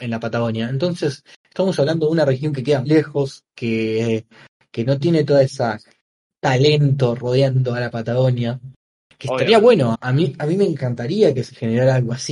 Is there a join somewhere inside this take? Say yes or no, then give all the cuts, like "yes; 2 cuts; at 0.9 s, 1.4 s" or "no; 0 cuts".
yes; 2 cuts; at 2.8 s, 9.9 s